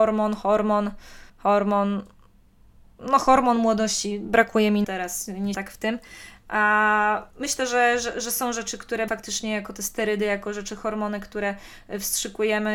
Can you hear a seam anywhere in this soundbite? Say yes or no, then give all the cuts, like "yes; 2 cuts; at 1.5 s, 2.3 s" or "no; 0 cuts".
yes; 5 cuts; at 1.3 s, 4.8 s, 5.5 s, 7.3 s, 9.1 s